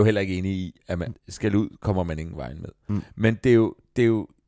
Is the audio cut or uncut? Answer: cut